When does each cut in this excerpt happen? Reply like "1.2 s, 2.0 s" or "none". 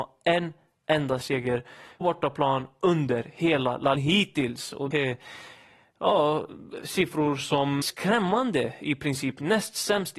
2.0 s, 4.0 s, 4.9 s, 7.8 s